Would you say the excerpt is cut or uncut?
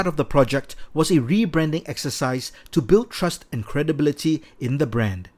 uncut